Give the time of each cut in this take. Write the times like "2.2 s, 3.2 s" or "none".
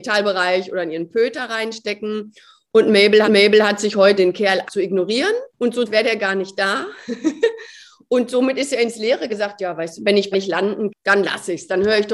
3.2 s, 4.2 s, 4.7 s, 5.5 s, 5.9 s, 9.3 s, 10.0 s, 10.3 s, 10.9 s